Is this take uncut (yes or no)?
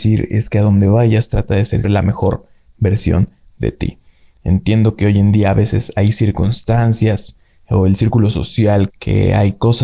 no